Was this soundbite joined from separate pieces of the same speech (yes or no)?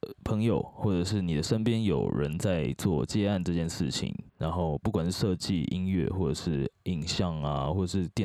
yes